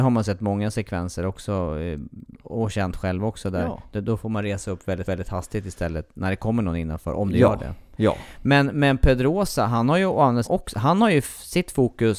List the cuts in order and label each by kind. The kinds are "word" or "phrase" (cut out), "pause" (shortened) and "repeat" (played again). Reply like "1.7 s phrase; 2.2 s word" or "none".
5.0 s repeat; 10.4 s word